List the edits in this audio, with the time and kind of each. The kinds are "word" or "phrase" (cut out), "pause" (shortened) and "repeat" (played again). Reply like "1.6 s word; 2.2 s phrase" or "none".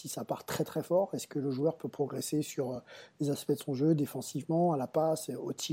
none